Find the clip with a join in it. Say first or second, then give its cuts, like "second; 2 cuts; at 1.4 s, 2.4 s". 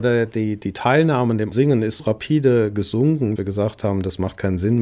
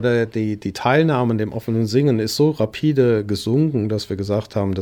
first; 3 cuts; at 1.5 s, 2.0 s, 3.4 s